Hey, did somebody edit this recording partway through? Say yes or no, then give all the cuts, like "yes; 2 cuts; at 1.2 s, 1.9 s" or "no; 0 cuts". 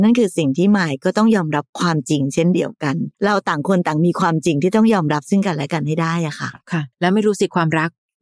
yes; 2 cuts; at 3.1 s, 6.9 s